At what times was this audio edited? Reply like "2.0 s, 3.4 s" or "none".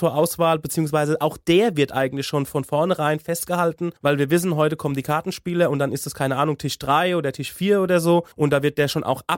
4.0 s, 8.3 s